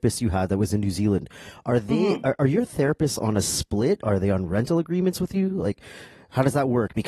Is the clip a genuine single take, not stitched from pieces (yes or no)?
yes